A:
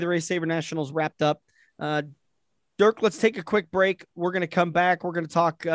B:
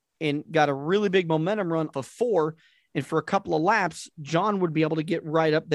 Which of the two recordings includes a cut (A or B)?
B